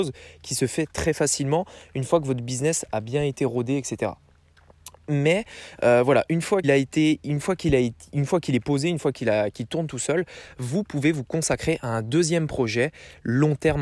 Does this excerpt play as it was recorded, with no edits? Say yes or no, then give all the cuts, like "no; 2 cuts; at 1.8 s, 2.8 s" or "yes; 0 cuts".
no; 1 cut; at 6.6 s